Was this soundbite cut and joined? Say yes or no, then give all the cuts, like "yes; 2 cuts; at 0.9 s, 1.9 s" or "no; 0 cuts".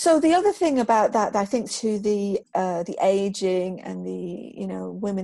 yes; 2 cuts; at 1.7 s, 2.4 s